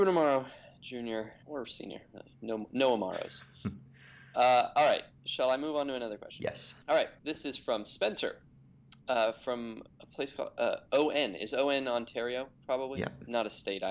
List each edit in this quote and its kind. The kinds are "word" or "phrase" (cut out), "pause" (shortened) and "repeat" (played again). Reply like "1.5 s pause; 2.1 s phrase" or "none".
1.4 s pause; 6.8 s pause; 7.2 s pause; 9.0 s pause; 9.9 s pause